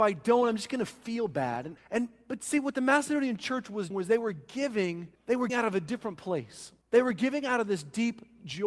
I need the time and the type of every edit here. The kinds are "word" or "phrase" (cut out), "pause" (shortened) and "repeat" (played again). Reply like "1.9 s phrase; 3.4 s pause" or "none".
1.8 s word; 3.9 s word; 5.2 s pause; 5.5 s word; 6.8 s pause